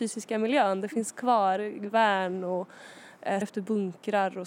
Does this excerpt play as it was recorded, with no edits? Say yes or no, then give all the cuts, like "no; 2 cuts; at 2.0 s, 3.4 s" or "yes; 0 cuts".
no; 1 cut; at 3.4 s